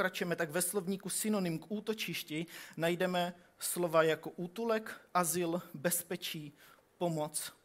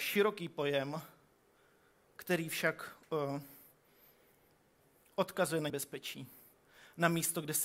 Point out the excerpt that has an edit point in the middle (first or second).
second